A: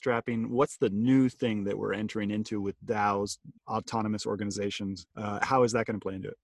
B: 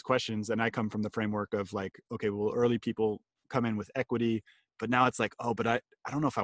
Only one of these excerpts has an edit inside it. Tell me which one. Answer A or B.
A